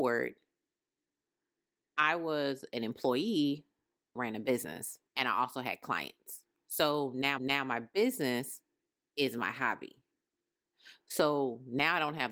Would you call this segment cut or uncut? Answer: cut